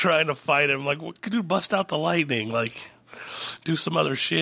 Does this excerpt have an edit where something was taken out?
no; 0 cuts

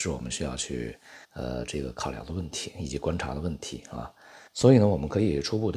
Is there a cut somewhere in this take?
yes; 2 cuts; at 1.2 s, 4.5 s

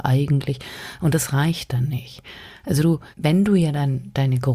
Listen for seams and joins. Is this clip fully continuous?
no; 1 cut; at 3.1 s

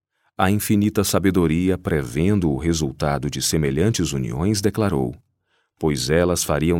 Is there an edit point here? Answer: no; 0 cuts

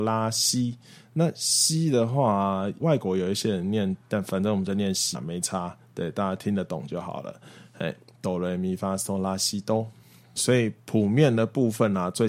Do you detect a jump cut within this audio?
yes; 4 cuts; at 2.8 s, 4.0 s, 5.1 s, 10.4 s

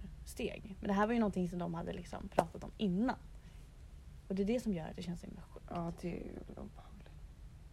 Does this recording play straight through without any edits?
yes; 0 cuts

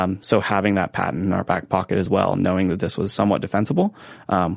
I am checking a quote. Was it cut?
no; 0 cuts

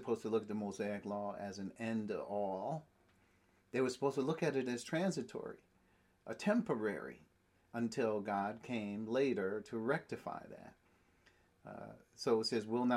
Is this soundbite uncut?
yes; 0 cuts

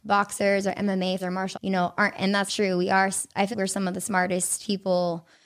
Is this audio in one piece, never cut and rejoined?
no; 5 cuts; at 1.2 s, 1.5 s, 2.2 s, 2.5 s, 3.5 s

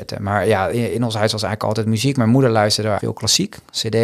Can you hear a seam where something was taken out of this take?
yes; 1 cut; at 3.0 s

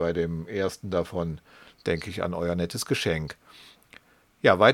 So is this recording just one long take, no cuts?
yes; 0 cuts

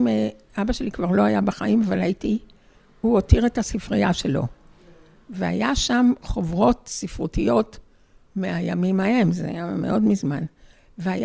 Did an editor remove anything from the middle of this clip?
no; 0 cuts

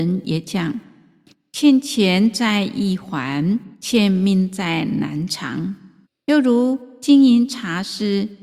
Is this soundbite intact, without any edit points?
no; 2 cuts; at 3.7 s, 6.0 s

